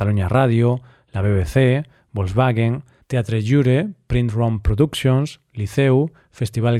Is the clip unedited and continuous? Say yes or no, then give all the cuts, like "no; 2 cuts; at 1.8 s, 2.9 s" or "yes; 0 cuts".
yes; 0 cuts